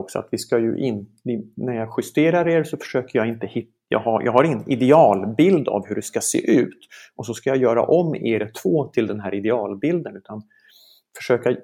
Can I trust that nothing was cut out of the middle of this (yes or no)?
yes